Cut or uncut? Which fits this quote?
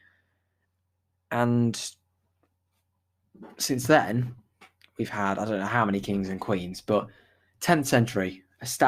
uncut